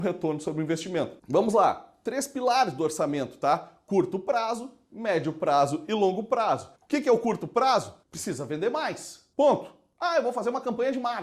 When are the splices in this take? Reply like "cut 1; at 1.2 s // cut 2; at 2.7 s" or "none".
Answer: cut 1; at 1.2 s // cut 2; at 6.8 s // cut 3; at 8.0 s // cut 4; at 9.3 s